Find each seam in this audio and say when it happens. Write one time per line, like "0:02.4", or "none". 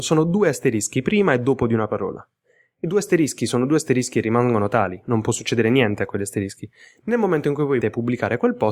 0:07.8